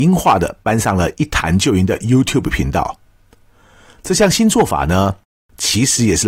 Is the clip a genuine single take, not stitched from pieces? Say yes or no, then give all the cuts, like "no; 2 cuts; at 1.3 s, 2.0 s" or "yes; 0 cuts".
yes; 0 cuts